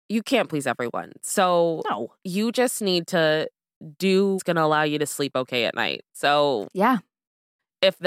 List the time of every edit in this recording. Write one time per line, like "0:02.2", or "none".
0:02.2
0:04.4